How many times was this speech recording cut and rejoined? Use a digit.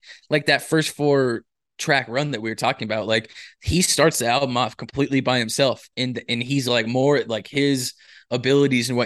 0